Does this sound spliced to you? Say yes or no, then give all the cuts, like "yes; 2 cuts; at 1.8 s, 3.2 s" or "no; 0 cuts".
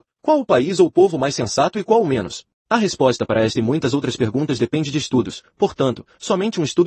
yes; 1 cut; at 2.5 s